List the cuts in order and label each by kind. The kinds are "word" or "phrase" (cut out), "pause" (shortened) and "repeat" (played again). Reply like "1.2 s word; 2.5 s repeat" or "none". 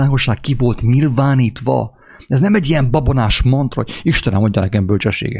none